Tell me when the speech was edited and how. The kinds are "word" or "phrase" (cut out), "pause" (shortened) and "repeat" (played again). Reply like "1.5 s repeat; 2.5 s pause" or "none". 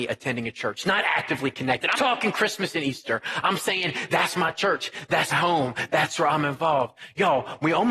2.0 s word; 5.3 s word